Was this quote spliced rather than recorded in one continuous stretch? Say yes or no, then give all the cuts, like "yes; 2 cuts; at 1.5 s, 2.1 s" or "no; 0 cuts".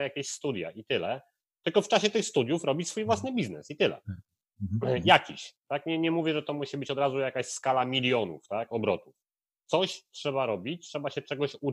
no; 0 cuts